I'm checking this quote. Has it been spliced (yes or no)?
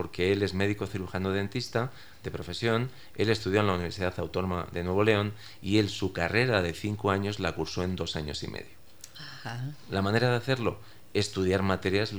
no